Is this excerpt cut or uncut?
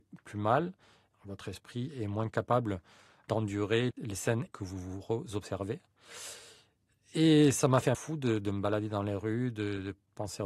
cut